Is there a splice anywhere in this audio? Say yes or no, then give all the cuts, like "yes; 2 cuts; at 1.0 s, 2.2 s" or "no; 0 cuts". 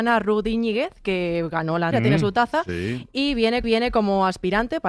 yes; 2 cuts; at 1.9 s, 3.6 s